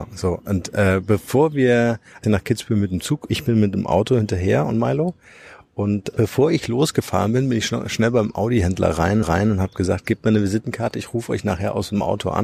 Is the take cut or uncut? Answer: cut